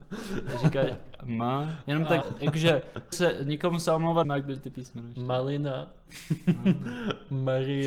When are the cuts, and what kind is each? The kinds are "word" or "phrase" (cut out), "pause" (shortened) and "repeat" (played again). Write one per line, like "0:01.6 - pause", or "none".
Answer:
0:01.2 - word
0:02.2 - word
0:03.1 - word
0:04.2 - word